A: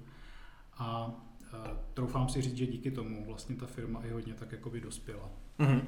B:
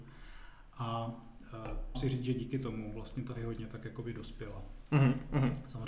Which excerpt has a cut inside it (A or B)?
B